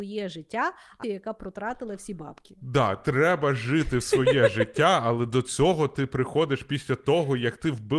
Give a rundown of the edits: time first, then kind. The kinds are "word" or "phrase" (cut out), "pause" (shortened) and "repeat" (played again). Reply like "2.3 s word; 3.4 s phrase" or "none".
1.0 s phrase